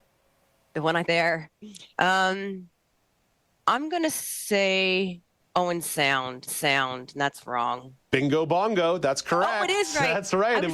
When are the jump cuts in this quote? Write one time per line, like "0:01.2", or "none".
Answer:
0:01.1
0:01.9
0:05.4
0:06.5

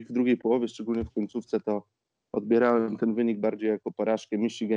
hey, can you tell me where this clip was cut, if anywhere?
none

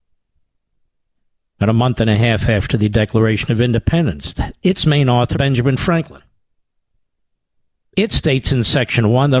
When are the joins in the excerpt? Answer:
0:05.3

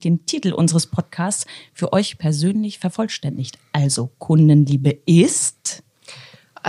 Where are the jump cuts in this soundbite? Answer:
none

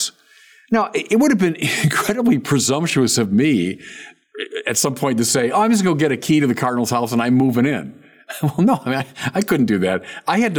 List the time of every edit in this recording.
none

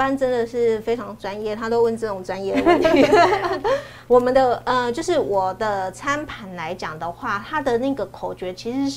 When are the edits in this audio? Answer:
0:04.1

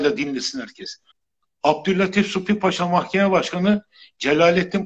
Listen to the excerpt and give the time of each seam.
0:01.1

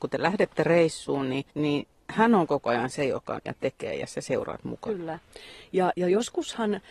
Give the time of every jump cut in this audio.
0:01.5
0:03.5

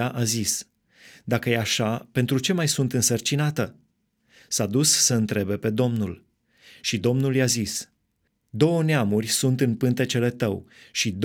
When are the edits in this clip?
none

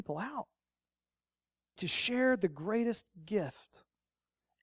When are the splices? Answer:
0:01.8

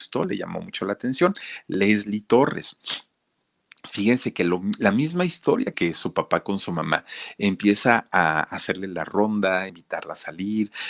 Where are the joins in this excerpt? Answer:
0:05.7
0:09.7

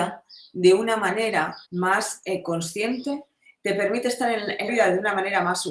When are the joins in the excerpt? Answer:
0:01.7
0:04.7

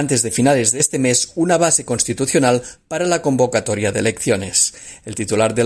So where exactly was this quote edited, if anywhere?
none

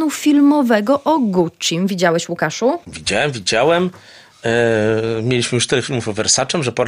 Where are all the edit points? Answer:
0:02.8

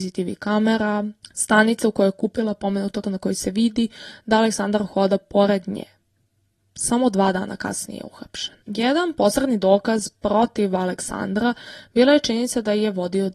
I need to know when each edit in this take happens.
0:03.0
0:08.6

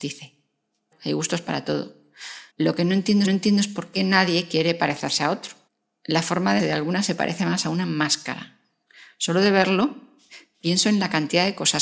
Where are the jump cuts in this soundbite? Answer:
0:00.9
0:02.5
0:03.2
0:05.7
0:06.6

